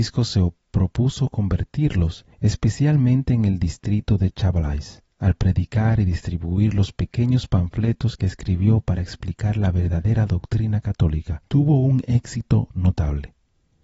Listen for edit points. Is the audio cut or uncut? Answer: cut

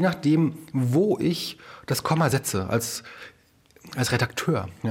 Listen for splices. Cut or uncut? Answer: uncut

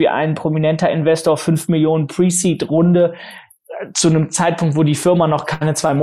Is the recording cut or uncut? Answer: uncut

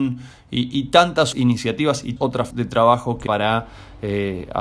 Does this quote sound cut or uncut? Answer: cut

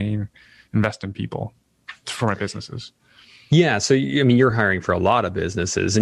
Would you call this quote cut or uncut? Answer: uncut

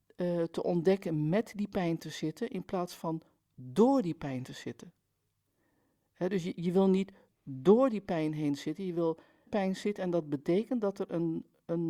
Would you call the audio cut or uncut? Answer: cut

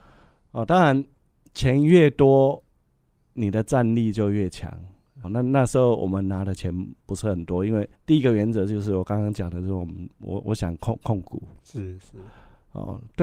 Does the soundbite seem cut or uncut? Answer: cut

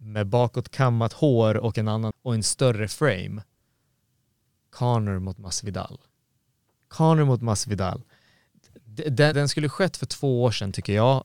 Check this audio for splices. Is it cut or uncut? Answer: cut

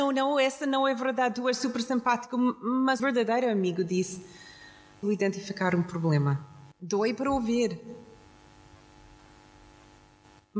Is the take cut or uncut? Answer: cut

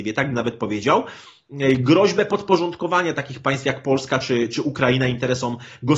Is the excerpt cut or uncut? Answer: uncut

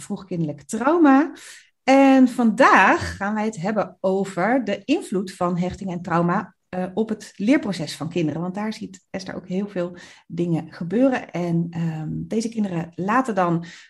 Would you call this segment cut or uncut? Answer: uncut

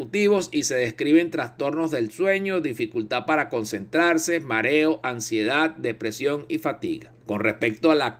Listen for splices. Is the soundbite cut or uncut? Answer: cut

